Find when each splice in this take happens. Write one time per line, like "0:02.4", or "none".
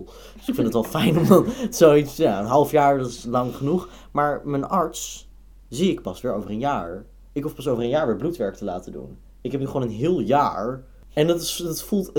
none